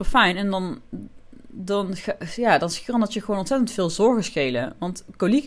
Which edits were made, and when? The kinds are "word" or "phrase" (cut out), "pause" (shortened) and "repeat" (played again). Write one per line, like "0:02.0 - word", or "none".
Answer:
none